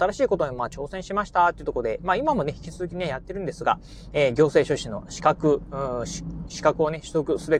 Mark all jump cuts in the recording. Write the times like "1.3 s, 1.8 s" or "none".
none